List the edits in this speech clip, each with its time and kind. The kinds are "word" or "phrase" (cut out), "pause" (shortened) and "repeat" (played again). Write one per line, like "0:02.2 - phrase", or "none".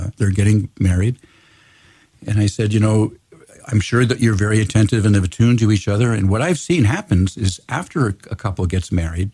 none